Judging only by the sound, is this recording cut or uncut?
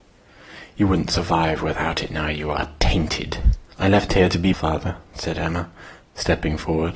cut